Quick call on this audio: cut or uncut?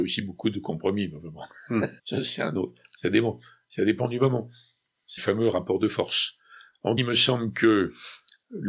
cut